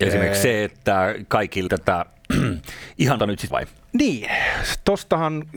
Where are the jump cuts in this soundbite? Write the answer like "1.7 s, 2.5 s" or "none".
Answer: 1.7 s, 3.2 s, 3.5 s